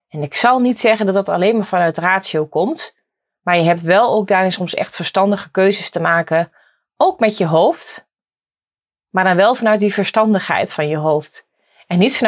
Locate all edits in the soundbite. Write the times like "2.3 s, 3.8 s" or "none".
none